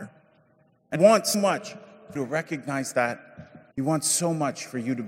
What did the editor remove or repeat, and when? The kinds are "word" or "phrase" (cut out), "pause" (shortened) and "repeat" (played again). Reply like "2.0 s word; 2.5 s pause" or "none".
1.0 s word; 1.3 s word; 2.2 s word; 3.7 s pause